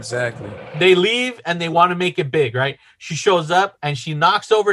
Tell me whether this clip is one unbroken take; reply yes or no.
yes